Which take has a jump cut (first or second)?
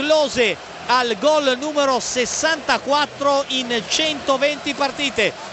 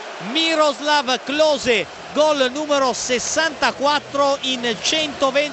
second